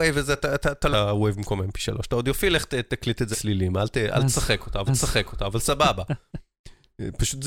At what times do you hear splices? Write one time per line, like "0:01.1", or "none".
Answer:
0:00.9
0:03.3
0:04.9